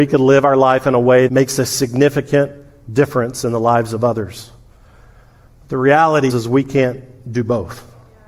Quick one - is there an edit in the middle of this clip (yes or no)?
yes